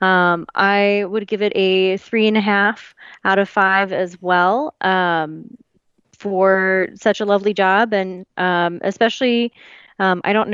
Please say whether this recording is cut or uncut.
uncut